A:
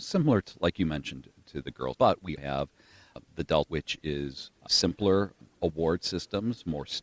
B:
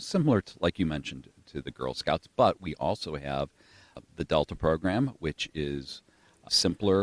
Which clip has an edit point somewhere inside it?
A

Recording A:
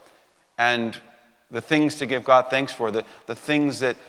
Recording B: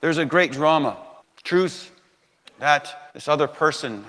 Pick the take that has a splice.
B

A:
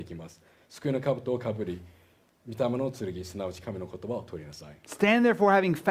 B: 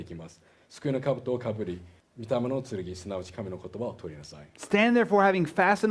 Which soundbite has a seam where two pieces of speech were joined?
B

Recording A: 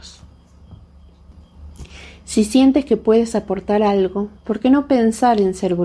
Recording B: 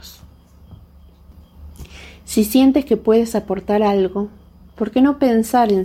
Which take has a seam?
A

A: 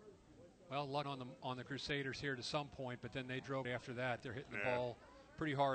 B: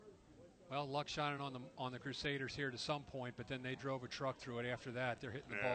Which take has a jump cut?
A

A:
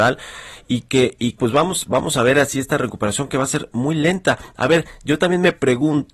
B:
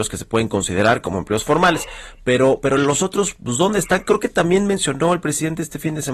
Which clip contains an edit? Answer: A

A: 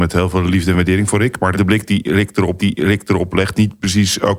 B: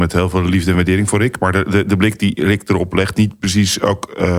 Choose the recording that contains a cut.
A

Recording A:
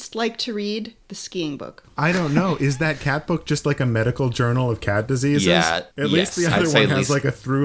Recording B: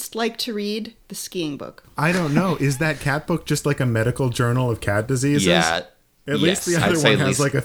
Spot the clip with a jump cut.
A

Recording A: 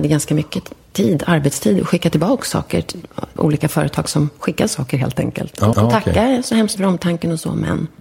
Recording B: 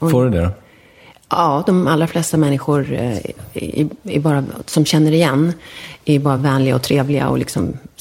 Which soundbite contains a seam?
A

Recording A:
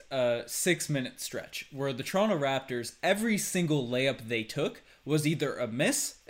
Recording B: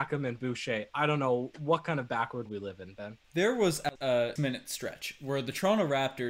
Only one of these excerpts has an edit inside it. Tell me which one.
B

